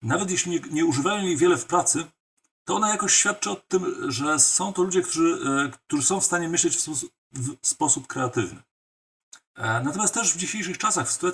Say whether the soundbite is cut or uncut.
cut